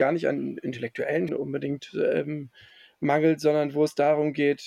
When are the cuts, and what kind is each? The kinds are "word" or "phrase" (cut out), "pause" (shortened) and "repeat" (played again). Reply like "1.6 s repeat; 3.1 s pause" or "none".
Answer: 1.3 s word